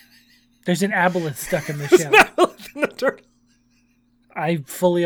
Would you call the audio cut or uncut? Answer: uncut